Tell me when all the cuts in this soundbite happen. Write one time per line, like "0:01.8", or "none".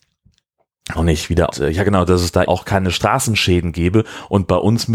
0:01.0
0:01.5
0:02.5